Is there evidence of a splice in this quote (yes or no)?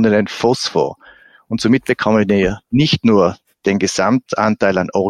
no